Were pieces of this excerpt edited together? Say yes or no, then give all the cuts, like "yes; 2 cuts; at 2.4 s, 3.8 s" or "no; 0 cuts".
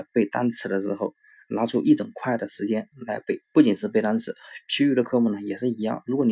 yes; 1 cut; at 3.4 s